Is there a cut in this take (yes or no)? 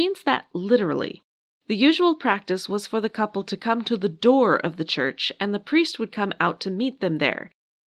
no